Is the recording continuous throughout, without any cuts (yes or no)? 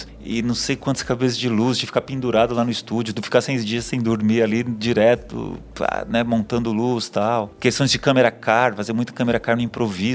yes